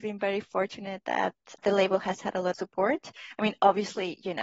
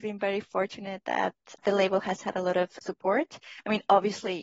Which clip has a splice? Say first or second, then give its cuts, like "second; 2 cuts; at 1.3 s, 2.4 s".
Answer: first; 1 cut; at 2.5 s